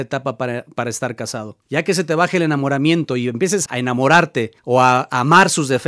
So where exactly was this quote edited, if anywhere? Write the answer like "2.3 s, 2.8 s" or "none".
1.6 s, 3.7 s, 4.6 s